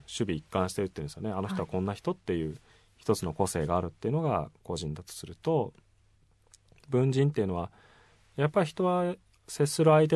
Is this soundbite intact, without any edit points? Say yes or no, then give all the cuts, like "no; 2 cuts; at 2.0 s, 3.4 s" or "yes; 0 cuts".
yes; 0 cuts